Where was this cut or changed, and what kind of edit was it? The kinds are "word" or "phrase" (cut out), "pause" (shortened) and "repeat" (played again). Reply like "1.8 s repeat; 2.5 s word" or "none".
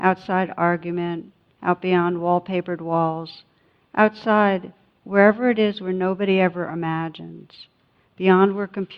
none